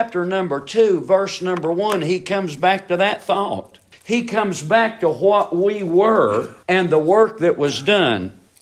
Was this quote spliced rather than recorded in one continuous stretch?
yes; 2 cuts; at 3.9 s, 6.6 s

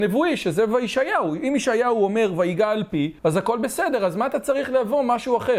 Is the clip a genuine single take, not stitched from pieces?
no; 1 cut; at 3.2 s

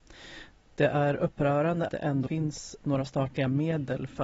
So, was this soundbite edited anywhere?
yes; 2 cuts; at 1.9 s, 2.3 s

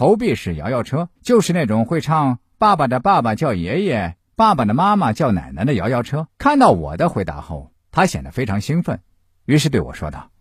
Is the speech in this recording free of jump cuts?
no; 3 cuts; at 1.2 s, 4.3 s, 6.3 s

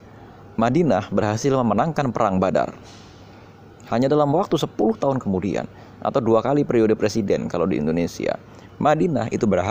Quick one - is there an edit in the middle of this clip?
no; 0 cuts

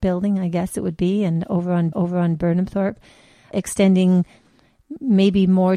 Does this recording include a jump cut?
yes; 1 cut; at 1.9 s

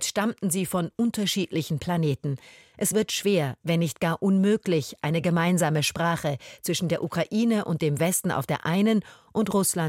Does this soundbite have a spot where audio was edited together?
no; 0 cuts

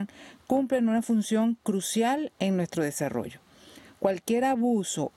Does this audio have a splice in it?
no; 0 cuts

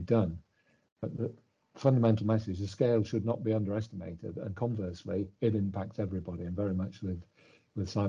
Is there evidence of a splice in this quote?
no; 0 cuts

